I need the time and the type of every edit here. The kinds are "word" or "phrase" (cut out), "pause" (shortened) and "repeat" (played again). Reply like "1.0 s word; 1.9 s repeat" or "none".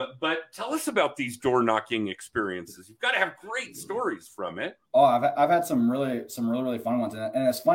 4.9 s pause